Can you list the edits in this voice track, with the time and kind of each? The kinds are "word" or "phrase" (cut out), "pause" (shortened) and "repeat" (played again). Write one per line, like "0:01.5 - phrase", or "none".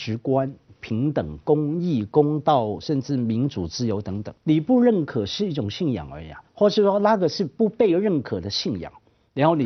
0:04.4 - pause
0:06.5 - pause